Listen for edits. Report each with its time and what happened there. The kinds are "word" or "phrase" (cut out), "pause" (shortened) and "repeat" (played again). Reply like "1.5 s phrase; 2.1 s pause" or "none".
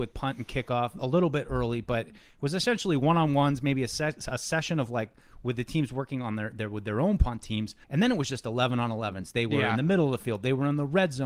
7.8 s pause